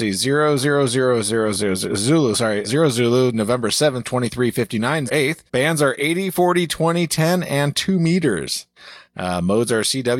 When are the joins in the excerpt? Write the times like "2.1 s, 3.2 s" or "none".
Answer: 1.5 s, 2.6 s, 4.0 s, 5.1 s, 5.5 s